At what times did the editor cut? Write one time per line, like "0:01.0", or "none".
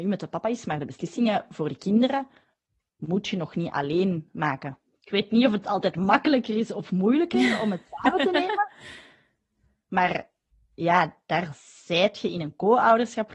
none